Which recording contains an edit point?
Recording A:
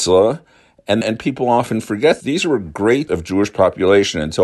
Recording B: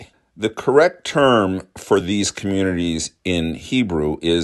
A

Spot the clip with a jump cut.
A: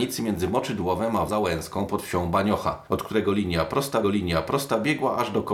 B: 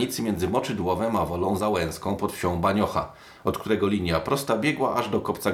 A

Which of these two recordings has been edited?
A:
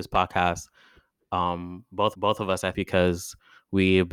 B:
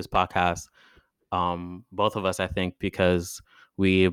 A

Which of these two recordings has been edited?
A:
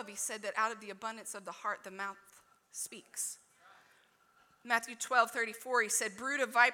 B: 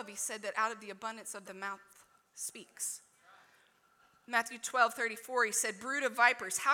B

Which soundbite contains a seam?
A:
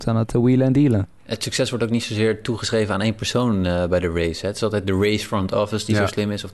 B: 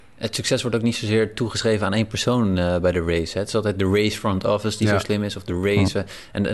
A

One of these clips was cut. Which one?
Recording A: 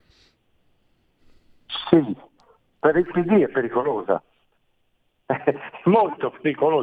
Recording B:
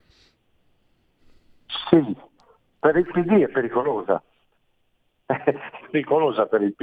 B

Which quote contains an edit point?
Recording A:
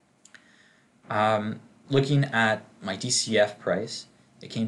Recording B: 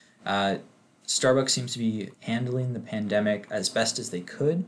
B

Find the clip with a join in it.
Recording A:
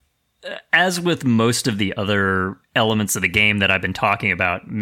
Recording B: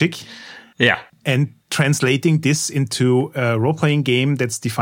B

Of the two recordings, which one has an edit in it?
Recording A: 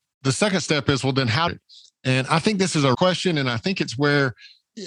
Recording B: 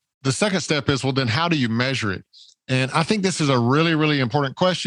A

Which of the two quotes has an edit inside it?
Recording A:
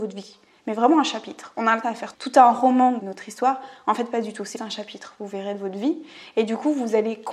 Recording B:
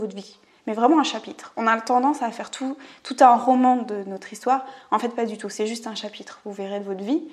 A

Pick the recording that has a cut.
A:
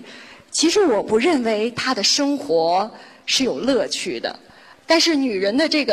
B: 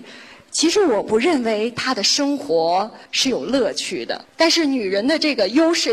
B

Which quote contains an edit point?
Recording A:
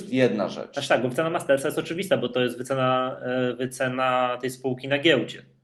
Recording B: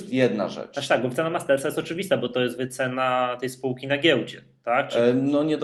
B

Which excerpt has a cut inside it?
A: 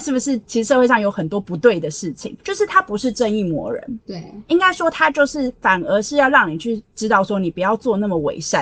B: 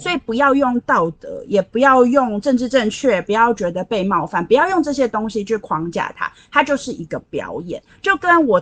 A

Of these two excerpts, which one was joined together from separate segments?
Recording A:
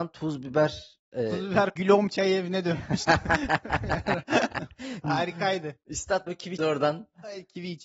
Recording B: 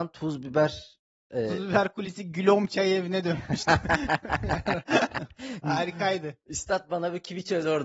A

